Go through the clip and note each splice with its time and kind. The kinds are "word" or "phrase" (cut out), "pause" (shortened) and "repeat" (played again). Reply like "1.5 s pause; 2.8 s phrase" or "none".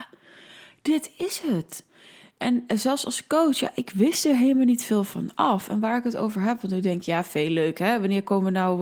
none